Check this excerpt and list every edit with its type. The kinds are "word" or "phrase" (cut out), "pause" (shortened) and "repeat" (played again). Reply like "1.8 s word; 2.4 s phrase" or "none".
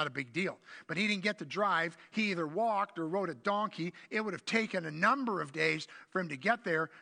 none